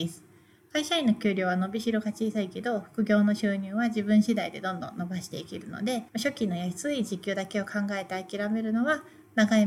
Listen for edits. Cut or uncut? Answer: cut